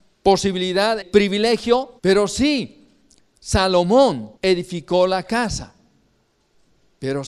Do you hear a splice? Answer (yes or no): yes